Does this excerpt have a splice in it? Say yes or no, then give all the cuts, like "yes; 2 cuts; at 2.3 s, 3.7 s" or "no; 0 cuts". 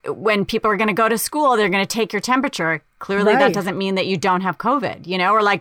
no; 0 cuts